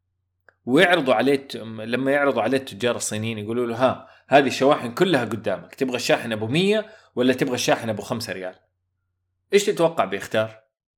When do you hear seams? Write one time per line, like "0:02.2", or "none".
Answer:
none